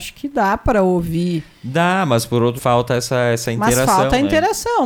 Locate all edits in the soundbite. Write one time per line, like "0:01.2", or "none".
0:02.6